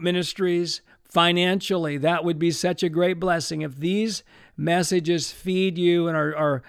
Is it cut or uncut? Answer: uncut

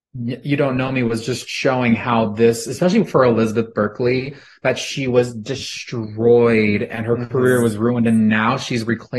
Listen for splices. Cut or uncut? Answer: uncut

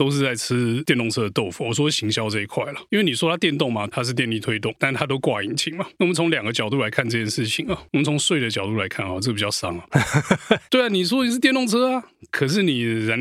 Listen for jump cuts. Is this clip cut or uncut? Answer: cut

